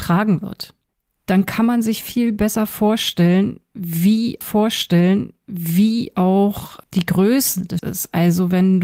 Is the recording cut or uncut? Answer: cut